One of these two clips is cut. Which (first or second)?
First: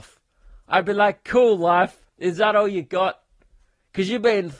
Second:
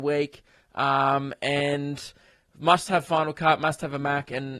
first